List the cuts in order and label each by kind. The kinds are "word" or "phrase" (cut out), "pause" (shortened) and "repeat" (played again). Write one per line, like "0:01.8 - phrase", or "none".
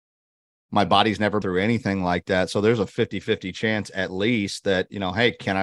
0:01.4 - word